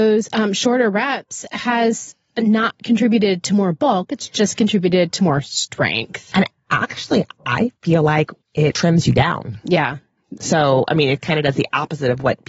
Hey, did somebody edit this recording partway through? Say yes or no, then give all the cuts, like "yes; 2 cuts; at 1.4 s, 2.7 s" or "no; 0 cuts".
yes; 2 cuts; at 7.8 s, 8.4 s